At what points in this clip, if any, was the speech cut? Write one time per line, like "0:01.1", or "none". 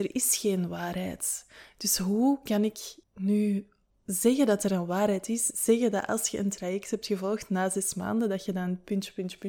0:03.0